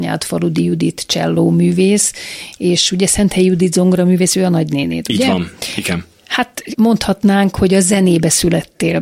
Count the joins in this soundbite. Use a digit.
1